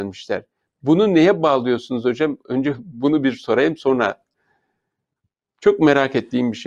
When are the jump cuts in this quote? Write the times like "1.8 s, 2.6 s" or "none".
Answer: none